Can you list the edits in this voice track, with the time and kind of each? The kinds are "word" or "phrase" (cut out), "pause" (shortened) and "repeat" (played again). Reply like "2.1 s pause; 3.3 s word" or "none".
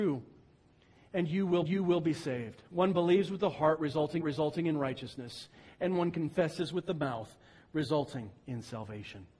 1.6 s repeat; 4.2 s repeat